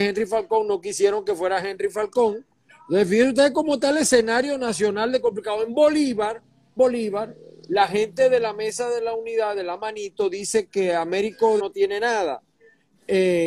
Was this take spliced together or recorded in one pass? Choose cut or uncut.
cut